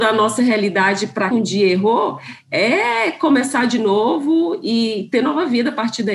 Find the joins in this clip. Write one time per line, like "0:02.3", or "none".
0:01.3